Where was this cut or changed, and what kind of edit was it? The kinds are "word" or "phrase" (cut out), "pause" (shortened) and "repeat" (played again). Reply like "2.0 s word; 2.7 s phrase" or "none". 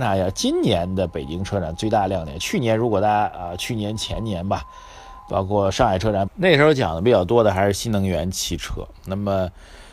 6.3 s phrase